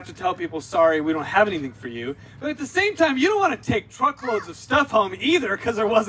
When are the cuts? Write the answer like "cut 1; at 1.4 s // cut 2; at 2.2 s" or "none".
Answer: none